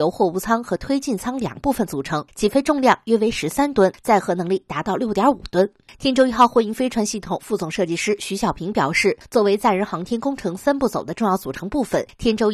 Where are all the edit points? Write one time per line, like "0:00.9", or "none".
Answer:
none